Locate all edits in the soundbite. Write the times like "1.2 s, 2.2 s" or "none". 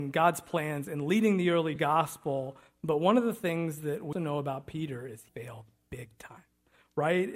1.8 s, 4.1 s, 5.3 s